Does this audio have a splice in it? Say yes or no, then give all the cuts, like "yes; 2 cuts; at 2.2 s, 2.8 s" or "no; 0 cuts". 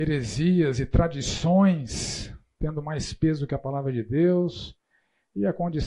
no; 0 cuts